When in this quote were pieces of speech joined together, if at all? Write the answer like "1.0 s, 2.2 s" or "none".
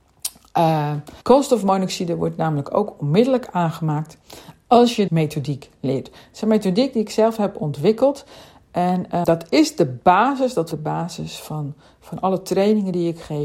1.2 s, 5.1 s, 9.2 s, 10.7 s